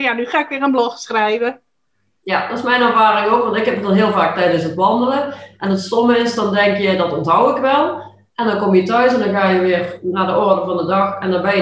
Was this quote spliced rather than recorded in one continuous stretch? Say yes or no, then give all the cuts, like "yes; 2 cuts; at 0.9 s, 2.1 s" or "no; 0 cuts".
no; 0 cuts